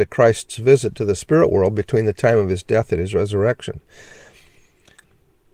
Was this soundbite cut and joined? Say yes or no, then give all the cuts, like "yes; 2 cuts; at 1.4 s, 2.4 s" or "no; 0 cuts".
no; 0 cuts